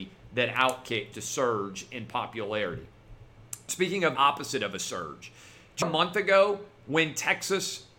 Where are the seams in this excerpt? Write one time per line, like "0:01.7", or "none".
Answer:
0:01.1
0:04.1
0:05.8

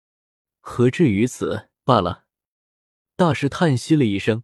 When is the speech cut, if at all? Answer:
0:01.8

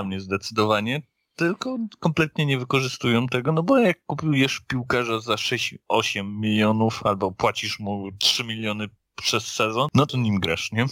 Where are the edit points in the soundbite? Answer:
none

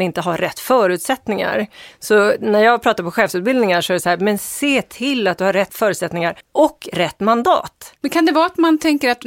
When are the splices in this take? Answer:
0:06.4

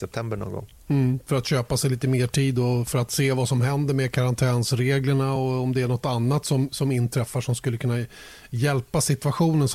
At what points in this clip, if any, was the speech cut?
none

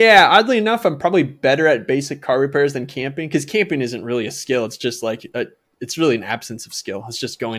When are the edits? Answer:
none

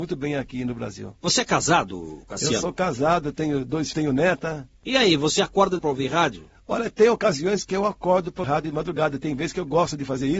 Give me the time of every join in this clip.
0:03.9
0:05.8
0:08.4

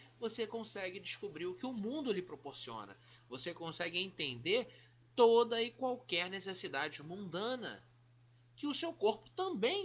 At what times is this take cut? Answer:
none

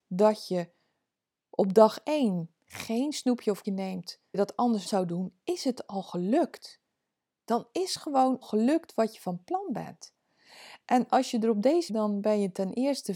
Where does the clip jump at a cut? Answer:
0:03.6
0:04.3
0:04.9
0:08.4
0:11.9

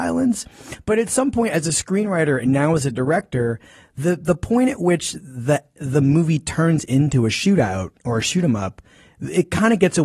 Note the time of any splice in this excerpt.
none

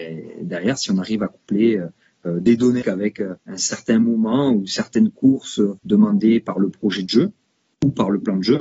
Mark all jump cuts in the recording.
0:02.8
0:03.4
0:05.8

